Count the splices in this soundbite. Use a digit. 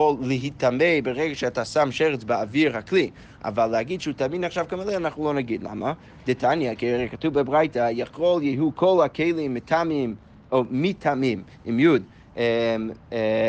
0